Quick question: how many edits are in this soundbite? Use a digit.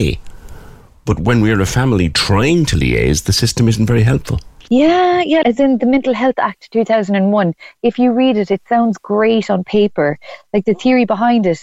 1